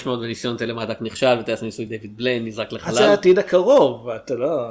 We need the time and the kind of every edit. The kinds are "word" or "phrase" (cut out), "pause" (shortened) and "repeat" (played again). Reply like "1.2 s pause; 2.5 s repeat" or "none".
none